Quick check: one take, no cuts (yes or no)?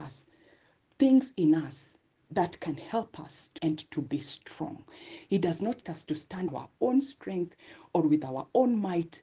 no